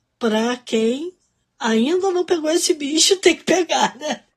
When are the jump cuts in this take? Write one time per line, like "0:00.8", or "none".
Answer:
none